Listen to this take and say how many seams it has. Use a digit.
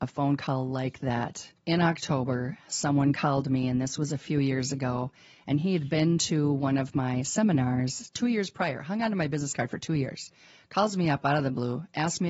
1